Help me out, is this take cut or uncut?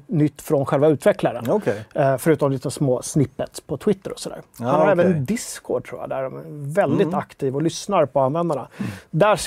uncut